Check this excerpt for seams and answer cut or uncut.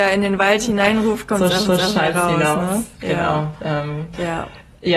cut